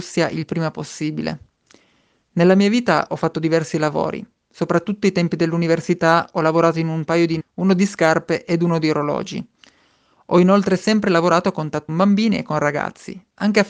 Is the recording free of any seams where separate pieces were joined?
no; 2 cuts; at 7.4 s, 11.9 s

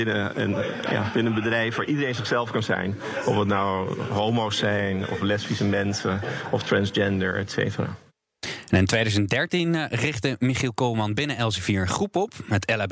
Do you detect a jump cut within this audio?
no; 0 cuts

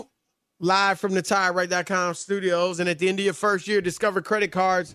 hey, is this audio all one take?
yes; 0 cuts

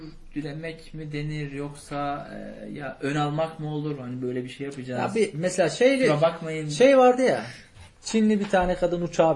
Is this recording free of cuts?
yes; 0 cuts

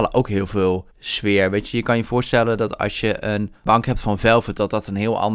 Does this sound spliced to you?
yes; 2 cuts; at 0.9 s, 3.7 s

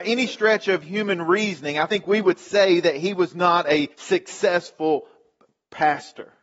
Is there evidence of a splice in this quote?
yes; 1 cut; at 3.9 s

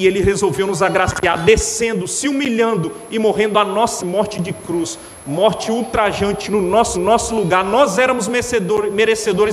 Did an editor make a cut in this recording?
yes; 3 cuts; at 4.0 s, 6.5 s, 6.9 s

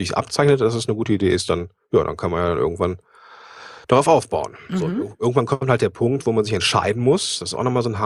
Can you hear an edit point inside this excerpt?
yes; 1 cut; at 3.8 s

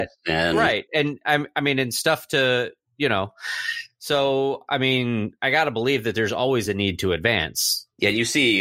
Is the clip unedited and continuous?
yes; 0 cuts

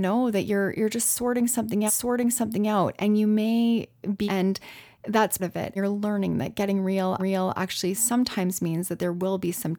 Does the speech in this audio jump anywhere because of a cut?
yes; 5 cuts; at 1.9 s, 4.3 s, 5.4 s, 5.8 s, 7.2 s

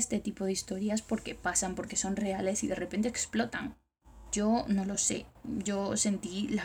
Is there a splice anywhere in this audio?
no; 0 cuts

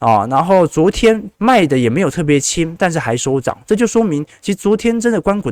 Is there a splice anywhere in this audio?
yes; 1 cut; at 1.4 s

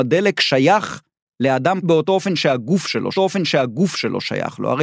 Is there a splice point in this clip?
yes; 2 cuts; at 1.8 s, 3.1 s

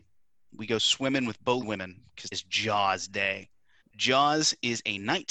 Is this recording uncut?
no; 3 cuts; at 1.6 s, 2.3 s, 3.8 s

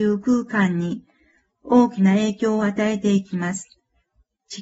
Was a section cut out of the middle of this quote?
no; 0 cuts

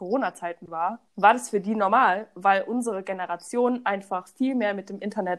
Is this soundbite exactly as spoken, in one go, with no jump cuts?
no; 1 cut; at 1.1 s

